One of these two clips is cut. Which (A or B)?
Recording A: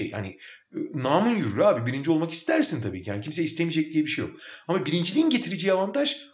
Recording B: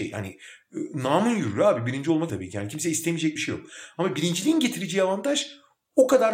B